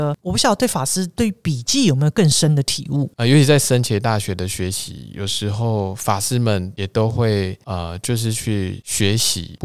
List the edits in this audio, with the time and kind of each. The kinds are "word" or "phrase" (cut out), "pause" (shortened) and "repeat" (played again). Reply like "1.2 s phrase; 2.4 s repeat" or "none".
3.1 s pause

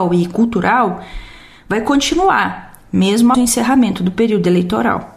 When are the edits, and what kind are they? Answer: 3.3 s word

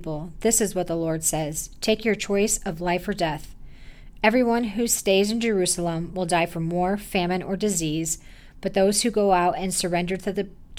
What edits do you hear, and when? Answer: none

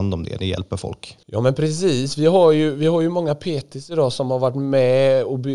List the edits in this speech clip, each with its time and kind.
1.2 s pause

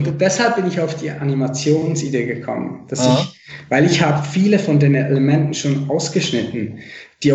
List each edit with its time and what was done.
none

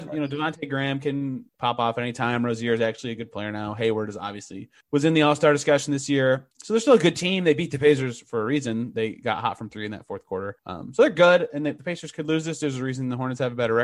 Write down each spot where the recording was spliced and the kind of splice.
1.5 s pause; 4.8 s pause; 6.5 s pause; 10.6 s pause

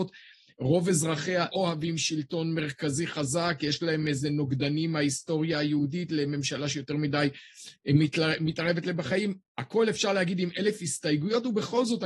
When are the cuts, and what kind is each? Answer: 1.5 s word

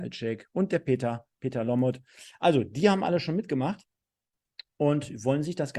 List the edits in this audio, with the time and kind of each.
none

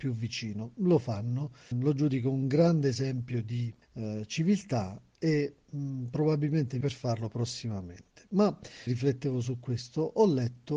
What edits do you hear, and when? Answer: 1.7 s word; 3.8 s pause; 6.8 s phrase; 8.9 s word

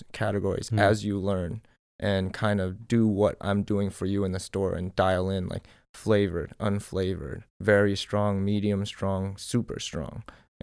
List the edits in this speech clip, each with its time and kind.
7.5 s pause

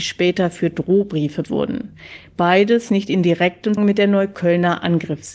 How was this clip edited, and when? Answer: 1.4 s word; 2.9 s word; 3.8 s word

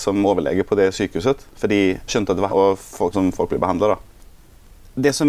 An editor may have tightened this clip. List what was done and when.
2.1 s word; 2.5 s word; 3.1 s phrase

